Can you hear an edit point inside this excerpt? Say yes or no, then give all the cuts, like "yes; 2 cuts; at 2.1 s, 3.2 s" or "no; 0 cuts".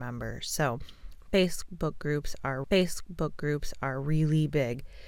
yes; 1 cut; at 2.6 s